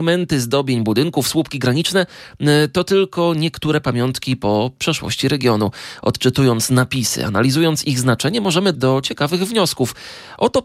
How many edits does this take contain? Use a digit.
1